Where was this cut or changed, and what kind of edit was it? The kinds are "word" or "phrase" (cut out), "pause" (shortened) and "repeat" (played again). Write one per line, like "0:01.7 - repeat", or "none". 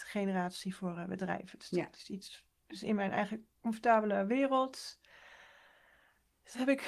none